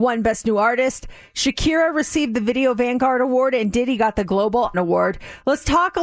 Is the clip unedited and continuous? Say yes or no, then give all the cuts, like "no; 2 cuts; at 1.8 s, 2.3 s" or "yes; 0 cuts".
no; 1 cut; at 4.7 s